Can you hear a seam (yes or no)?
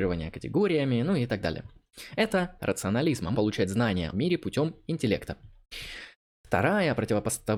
yes